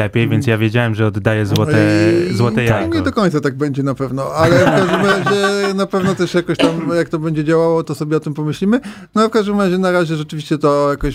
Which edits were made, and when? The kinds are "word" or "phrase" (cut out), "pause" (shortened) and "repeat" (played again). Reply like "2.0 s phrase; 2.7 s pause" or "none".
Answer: 7.8 s word